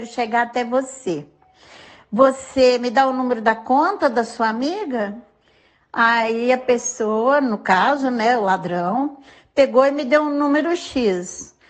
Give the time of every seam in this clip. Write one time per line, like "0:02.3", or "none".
none